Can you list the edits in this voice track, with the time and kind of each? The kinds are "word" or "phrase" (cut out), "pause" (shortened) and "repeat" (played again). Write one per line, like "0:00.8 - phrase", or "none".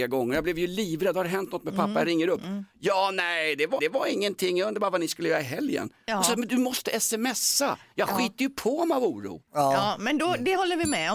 0:03.8 - repeat